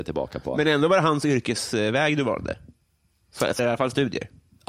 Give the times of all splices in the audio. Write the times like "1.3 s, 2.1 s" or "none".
3.6 s